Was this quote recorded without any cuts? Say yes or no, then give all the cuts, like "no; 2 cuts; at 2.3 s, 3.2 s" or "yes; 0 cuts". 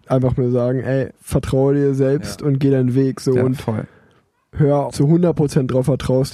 no; 2 cuts; at 1.2 s, 4.9 s